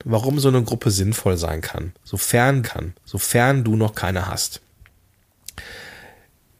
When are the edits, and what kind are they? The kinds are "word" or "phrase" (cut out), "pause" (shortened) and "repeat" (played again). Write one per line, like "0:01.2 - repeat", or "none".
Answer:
0:02.6 - repeat